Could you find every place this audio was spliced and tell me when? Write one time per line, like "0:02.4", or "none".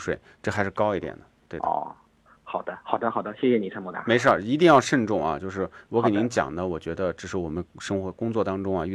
0:01.4

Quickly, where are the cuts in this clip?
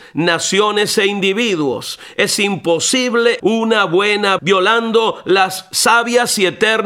0:03.4
0:04.4

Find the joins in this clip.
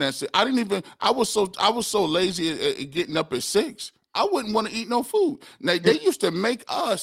none

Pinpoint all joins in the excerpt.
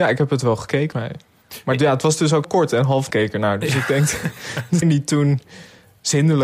0:00.9
0:02.4
0:03.1
0:04.8

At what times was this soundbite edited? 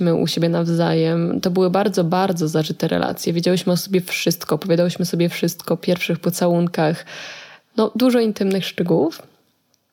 none

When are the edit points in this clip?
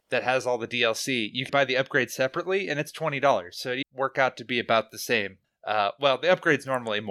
0:01.5
0:03.8
0:05.4

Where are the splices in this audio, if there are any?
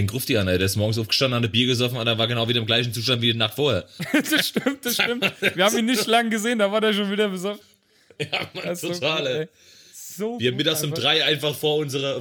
none

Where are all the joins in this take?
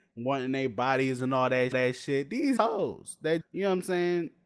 0:01.7
0:02.6
0:03.4

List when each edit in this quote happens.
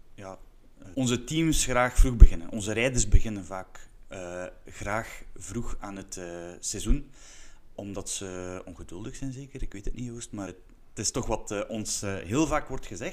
0:00.9
0:10.5

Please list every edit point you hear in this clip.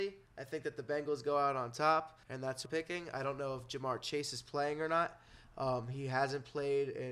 0:02.2
0:02.6

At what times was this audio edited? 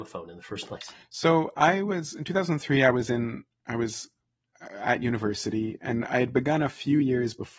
none

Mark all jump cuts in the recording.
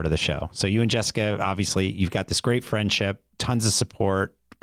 0:03.3

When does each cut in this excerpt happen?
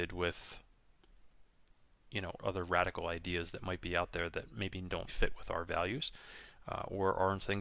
0:02.4
0:05.1

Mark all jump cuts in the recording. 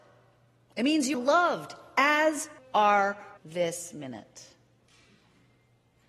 0:01.1
0:02.6
0:03.4

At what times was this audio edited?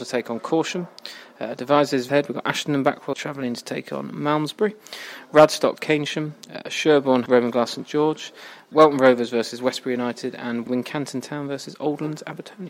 0:02.1
0:03.1
0:05.8
0:07.3
0:08.7
0:10.7

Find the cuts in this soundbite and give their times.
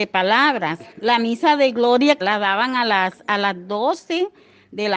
0:00.9
0:02.2

